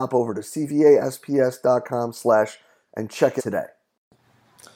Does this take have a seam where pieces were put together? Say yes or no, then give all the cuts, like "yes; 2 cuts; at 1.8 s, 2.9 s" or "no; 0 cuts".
yes; 2 cuts; at 2.9 s, 3.4 s